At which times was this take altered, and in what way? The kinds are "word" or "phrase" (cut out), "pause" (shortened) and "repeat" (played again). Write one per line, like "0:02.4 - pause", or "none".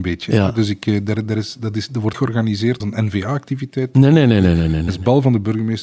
0:02.1 - word
0:02.8 - word